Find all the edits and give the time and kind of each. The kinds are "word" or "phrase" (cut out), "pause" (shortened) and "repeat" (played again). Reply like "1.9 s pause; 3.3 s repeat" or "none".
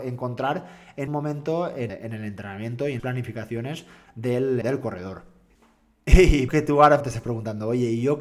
1.1 s word; 1.9 s word; 3.0 s word; 4.6 s word; 6.5 s word; 7.0 s word